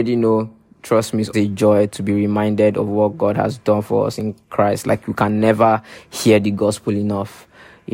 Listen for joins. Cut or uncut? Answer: cut